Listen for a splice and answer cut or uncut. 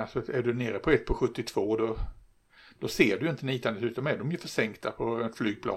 uncut